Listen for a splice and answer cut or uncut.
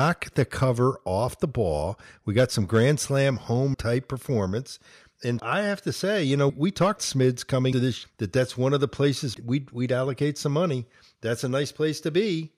cut